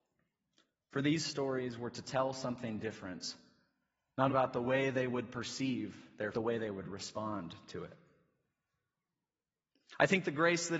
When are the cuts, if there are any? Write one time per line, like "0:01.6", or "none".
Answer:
0:04.3
0:06.3